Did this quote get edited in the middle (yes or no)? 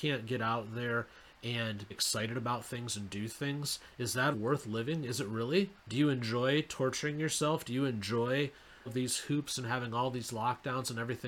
yes